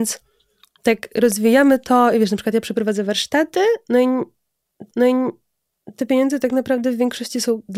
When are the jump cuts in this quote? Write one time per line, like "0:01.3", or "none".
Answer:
0:04.9